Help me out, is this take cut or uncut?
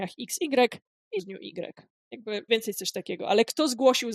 cut